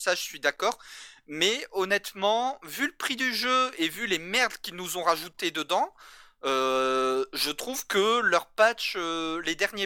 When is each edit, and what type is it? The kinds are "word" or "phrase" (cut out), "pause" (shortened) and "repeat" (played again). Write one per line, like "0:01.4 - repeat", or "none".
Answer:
none